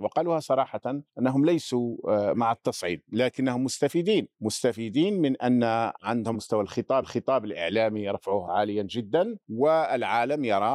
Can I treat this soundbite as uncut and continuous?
no; 5 cuts; at 1.1 s, 4.3 s, 6.3 s, 7.0 s, 9.4 s

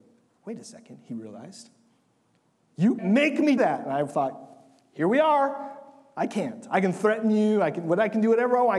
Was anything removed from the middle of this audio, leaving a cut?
yes; 2 cuts; at 3.0 s, 3.6 s

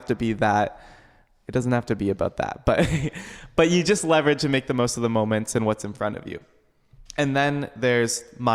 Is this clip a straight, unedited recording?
yes; 0 cuts

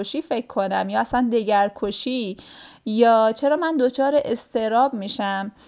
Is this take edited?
no; 0 cuts

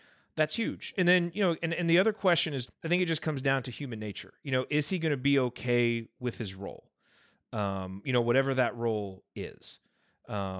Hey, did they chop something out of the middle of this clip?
yes; 1 cut; at 2.7 s

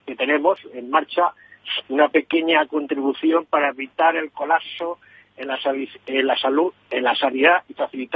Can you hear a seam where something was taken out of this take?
yes; 1 cut; at 1.8 s

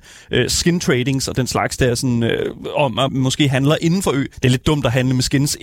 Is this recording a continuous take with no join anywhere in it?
no; 2 cuts; at 3.1 s, 4.3 s

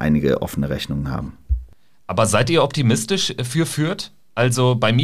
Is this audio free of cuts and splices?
yes; 0 cuts

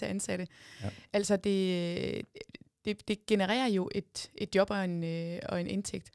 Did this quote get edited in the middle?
no; 0 cuts

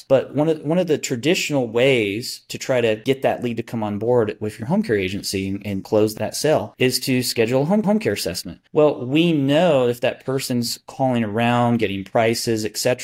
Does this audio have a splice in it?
yes; 2 cuts; at 7.8 s, 8.7 s

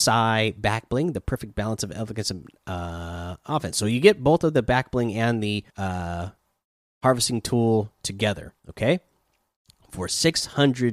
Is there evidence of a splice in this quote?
yes; 2 cuts; at 5.7 s, 8.6 s

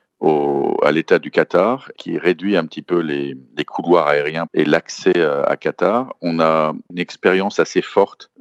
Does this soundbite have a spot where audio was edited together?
yes; 2 cuts; at 2.0 s, 4.5 s

